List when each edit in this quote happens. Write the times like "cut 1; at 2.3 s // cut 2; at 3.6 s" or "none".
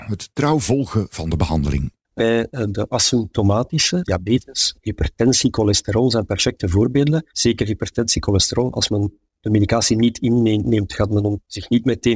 cut 1; at 2.2 s // cut 2; at 4.0 s // cut 3; at 7.3 s